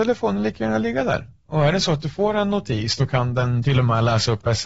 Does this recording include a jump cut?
no; 0 cuts

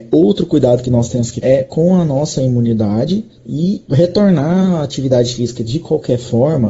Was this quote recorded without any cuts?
no; 2 cuts; at 1.4 s, 3.9 s

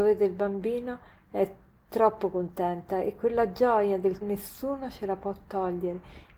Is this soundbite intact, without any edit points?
no; 1 cut; at 4.2 s

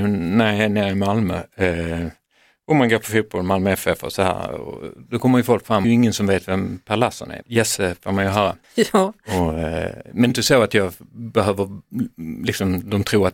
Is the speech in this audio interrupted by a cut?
yes; 4 cuts; at 5.8 s, 7.4 s, 8.6 s, 10.3 s

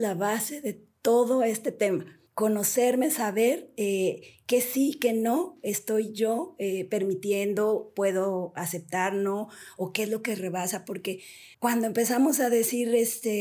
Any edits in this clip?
yes; 2 cuts; at 2.3 s, 11.5 s

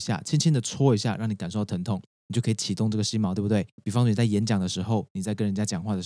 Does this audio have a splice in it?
yes; 1 cut; at 3.7 s

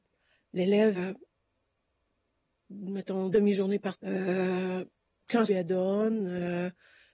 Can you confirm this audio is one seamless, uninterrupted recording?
no; 4 cuts; at 0.9 s, 3.3 s, 3.9 s, 5.5 s

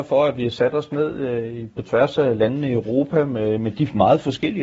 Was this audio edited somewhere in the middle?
no; 0 cuts

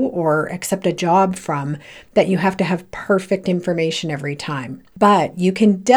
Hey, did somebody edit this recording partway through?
no; 0 cuts

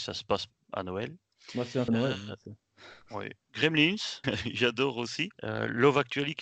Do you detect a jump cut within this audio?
yes; 3 cuts; at 1.9 s, 4.2 s, 5.3 s

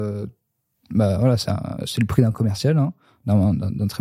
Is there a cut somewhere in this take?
no; 0 cuts

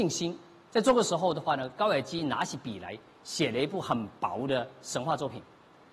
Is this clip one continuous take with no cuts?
yes; 0 cuts

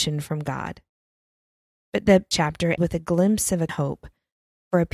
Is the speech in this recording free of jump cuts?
no; 3 cuts; at 2.3 s, 2.8 s, 3.7 s

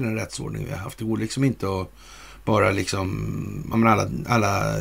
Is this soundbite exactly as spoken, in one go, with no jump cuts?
yes; 0 cuts

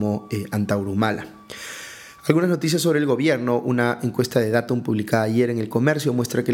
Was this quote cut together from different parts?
no; 0 cuts

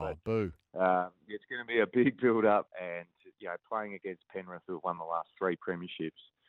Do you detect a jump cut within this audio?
yes; 1 cut; at 2.7 s

